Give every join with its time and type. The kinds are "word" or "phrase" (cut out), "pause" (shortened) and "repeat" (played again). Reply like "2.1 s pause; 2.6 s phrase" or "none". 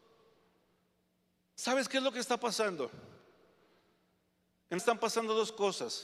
4.8 s word